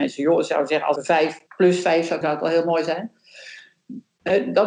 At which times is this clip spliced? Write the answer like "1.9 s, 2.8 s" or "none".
1.0 s, 1.5 s, 2.2 s